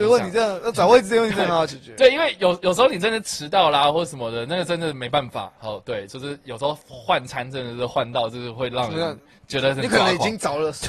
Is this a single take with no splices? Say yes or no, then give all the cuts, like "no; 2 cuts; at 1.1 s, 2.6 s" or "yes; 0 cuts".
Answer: yes; 0 cuts